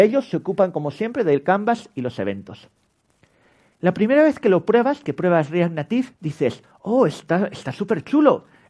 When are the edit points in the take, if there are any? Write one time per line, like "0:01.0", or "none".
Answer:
0:06.1

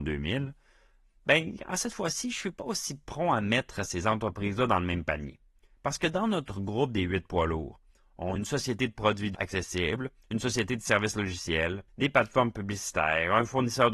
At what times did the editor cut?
0:08.4
0:09.3
0:11.9

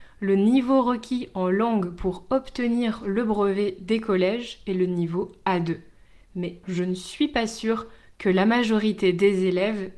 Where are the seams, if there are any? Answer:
0:06.6

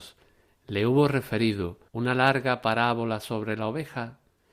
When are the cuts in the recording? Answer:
0:01.9

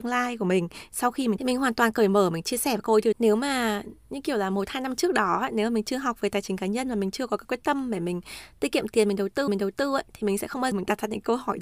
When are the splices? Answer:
0:01.4
0:03.1
0:09.5
0:10.7

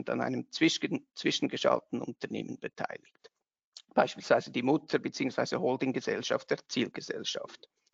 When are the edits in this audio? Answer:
none

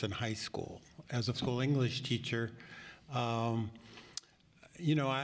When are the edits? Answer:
0:01.3

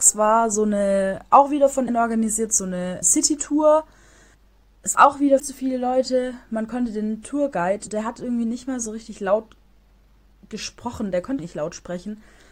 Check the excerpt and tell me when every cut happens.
0:01.9
0:03.0
0:04.9
0:05.4
0:07.9
0:11.4

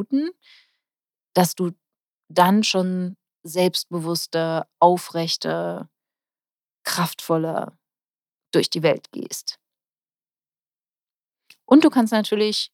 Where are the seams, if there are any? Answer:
none

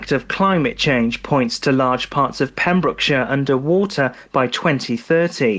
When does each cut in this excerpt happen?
none

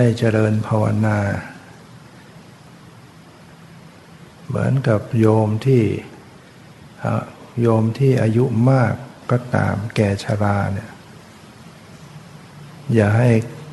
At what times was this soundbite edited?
0:07.5

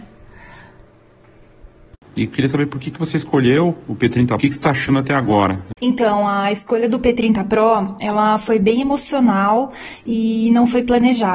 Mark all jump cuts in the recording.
0:04.4
0:05.8

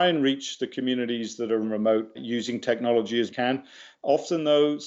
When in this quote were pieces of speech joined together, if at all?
0:01.6
0:02.1
0:03.3

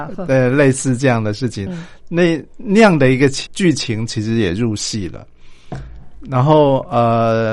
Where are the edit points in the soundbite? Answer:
0:01.7
0:03.5

